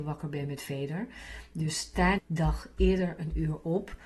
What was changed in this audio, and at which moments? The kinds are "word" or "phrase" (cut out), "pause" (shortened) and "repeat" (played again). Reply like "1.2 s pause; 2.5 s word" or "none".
2.2 s word

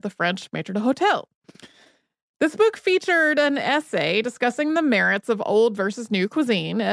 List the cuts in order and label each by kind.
none

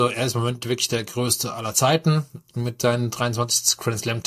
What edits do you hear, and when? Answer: none

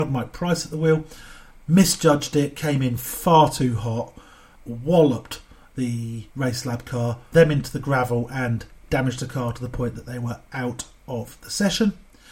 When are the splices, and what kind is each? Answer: 4.6 s word; 6.3 s pause; 7.3 s phrase

